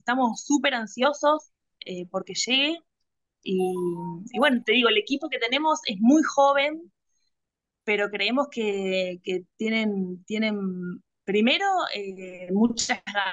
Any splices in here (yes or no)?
no